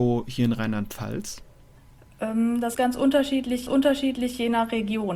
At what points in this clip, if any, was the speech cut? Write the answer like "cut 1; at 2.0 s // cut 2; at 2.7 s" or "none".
cut 1; at 2.7 s // cut 2; at 3.7 s